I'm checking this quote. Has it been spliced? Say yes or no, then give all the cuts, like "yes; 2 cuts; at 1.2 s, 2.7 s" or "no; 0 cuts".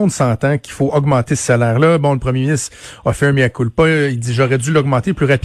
no; 0 cuts